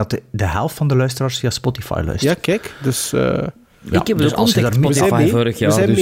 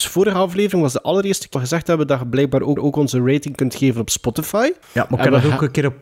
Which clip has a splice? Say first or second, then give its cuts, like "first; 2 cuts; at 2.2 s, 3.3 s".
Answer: second; 3 cuts; at 1.5 s, 2.8 s, 4.8 s